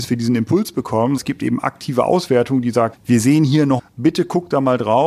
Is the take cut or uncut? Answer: cut